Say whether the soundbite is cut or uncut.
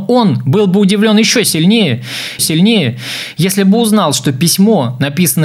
cut